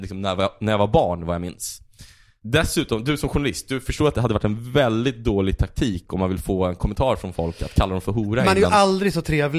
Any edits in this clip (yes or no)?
no